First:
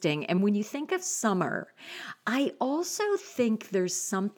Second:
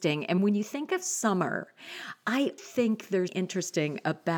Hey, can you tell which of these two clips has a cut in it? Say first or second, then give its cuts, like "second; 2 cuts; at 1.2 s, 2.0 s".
second; 2 cuts; at 2.6 s, 3.3 s